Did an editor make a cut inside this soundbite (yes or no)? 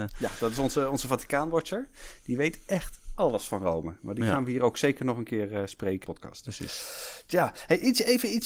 yes